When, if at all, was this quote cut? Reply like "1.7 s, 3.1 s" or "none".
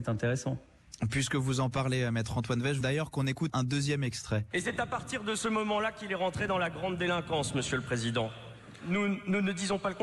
2.8 s, 3.5 s